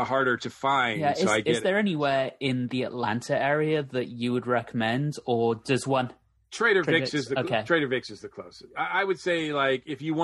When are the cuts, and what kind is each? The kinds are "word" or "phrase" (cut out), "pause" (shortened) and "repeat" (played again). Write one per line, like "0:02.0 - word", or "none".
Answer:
none